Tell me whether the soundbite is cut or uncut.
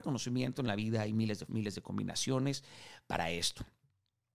cut